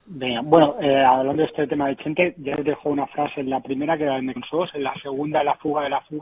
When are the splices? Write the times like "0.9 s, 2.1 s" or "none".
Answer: 4.4 s